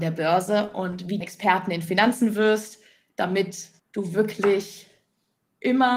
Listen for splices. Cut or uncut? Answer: cut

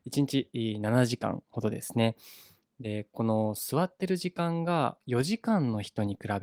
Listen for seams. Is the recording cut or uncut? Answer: uncut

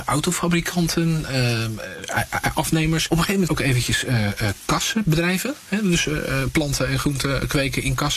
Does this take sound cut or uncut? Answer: cut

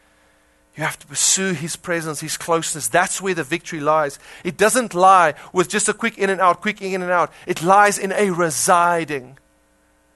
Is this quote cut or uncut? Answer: uncut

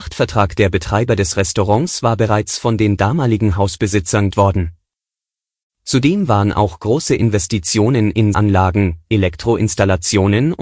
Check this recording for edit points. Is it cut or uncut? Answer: cut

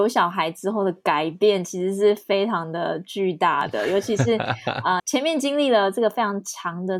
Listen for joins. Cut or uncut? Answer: cut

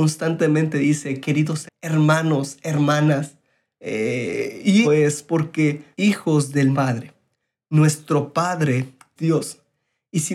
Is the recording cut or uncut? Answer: cut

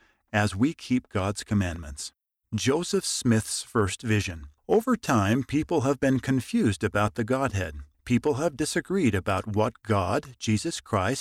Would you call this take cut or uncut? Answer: cut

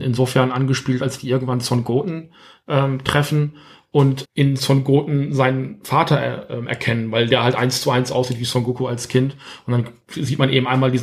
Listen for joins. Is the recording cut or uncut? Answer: cut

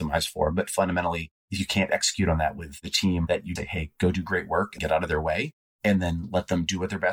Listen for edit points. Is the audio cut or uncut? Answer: cut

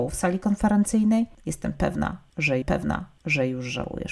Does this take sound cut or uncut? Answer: cut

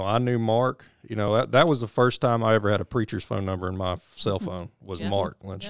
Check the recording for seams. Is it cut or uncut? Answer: uncut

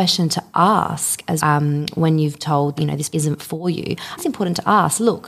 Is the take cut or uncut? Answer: cut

